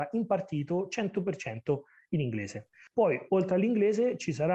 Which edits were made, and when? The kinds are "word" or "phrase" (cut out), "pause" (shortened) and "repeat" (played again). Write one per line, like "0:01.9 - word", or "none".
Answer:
none